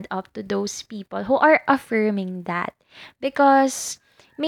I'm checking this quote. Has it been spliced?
no; 0 cuts

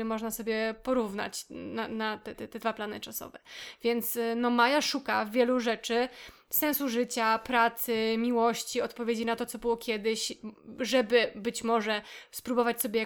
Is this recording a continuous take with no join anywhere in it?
no; 1 cut; at 2.3 s

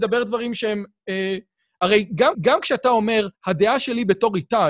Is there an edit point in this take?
yes; 2 cuts; at 2.3 s, 3.3 s

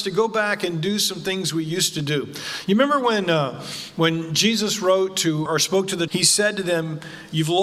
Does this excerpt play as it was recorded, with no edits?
no; 2 cuts; at 5.5 s, 6.1 s

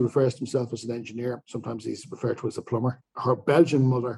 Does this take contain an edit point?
no; 0 cuts

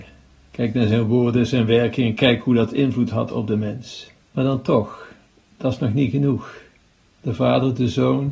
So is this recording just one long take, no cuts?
no; 1 cut; at 4.2 s

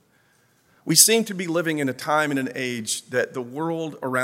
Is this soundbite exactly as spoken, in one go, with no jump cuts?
yes; 0 cuts

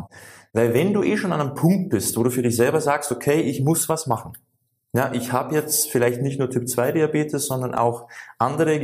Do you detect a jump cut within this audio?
no; 0 cuts

